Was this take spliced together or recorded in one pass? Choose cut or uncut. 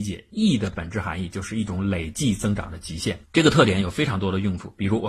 cut